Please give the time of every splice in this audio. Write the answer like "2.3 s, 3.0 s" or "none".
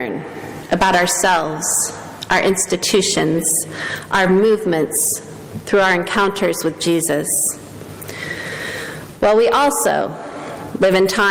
none